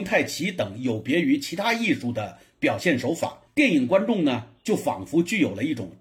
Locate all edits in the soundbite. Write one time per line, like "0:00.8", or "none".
0:03.5

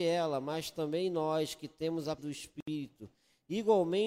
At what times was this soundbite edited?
0:02.2

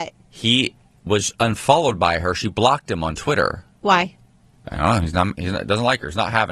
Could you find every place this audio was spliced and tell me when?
none

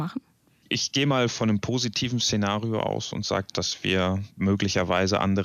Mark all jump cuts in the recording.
0:04.3

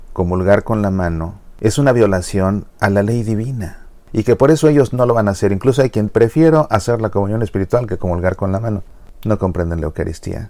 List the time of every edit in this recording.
0:06.1

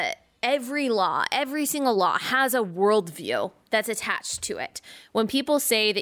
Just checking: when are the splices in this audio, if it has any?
none

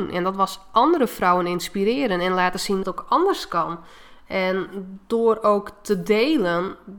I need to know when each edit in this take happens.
0:02.8

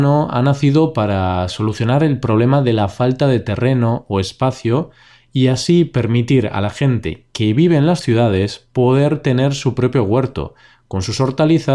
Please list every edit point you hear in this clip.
none

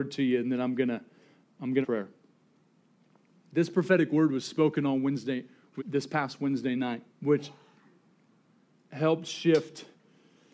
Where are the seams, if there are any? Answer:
0:01.4
0:01.8
0:05.8
0:07.1

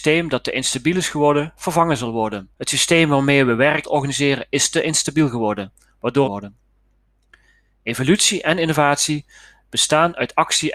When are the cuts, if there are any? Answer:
0:02.5
0:03.8
0:06.2

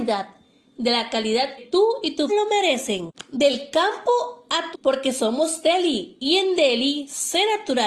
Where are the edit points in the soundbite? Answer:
0:01.6
0:02.3
0:04.7

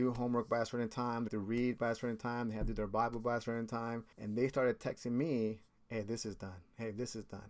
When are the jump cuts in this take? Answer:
0:01.3
0:04.1

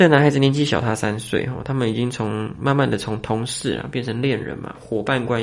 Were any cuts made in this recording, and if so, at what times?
none

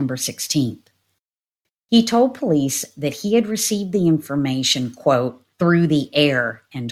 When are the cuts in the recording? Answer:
0:05.5

